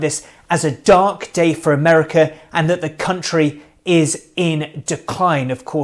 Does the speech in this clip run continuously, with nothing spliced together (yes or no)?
yes